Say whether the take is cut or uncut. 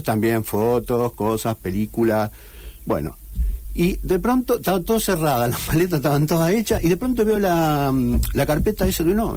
uncut